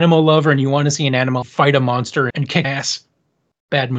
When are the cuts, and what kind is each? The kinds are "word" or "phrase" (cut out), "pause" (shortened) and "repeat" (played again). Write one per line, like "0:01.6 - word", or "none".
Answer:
0:01.4 - word
0:02.3 - word
0:02.6 - word